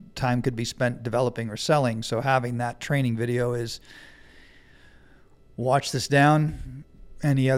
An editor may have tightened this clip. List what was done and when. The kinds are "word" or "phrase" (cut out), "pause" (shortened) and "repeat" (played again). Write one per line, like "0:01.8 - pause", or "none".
none